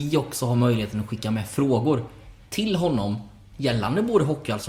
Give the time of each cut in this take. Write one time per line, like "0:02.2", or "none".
0:03.4